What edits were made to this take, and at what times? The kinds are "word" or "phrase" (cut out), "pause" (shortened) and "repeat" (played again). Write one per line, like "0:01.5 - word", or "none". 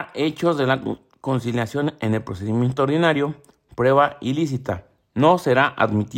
none